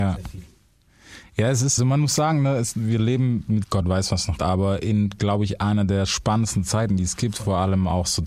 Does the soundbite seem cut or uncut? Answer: cut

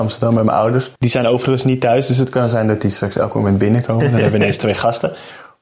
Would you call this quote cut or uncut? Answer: cut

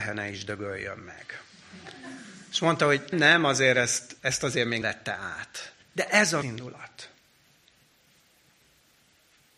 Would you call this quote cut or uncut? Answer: cut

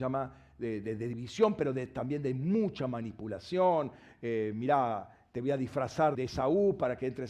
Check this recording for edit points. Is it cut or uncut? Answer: cut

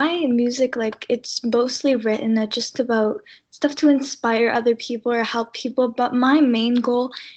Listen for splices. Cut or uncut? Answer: uncut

